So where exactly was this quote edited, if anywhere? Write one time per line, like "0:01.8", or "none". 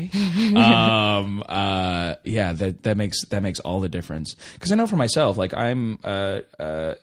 0:02.2